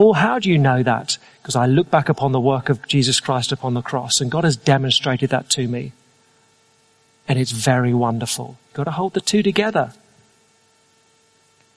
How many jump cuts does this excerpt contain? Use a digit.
0